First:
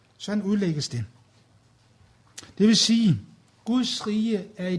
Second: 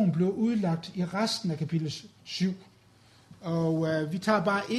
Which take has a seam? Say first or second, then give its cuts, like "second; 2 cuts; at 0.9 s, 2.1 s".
first; 1 cut; at 3.5 s